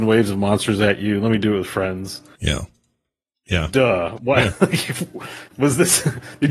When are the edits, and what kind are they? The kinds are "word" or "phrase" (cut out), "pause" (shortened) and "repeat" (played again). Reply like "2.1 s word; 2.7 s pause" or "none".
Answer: none